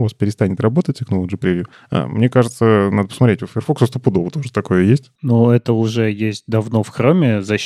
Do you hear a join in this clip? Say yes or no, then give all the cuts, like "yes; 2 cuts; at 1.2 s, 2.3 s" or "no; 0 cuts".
no; 0 cuts